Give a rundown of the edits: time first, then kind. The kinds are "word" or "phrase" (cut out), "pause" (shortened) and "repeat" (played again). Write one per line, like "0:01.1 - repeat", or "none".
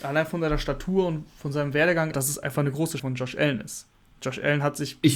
0:02.1 - phrase
0:03.0 - word